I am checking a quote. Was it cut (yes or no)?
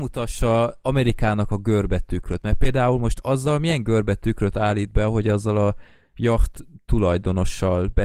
no